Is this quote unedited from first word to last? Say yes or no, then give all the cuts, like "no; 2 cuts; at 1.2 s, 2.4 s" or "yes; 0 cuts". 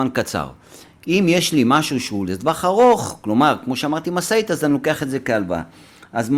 yes; 0 cuts